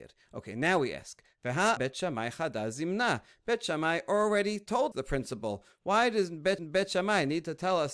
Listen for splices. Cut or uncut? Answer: cut